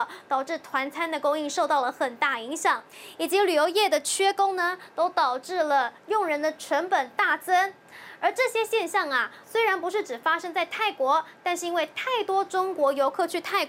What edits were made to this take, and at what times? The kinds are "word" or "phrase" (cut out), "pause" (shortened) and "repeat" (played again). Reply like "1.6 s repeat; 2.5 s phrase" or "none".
6.0 s pause; 9.4 s pause